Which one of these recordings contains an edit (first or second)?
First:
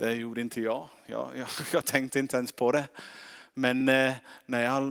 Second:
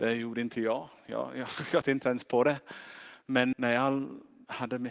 second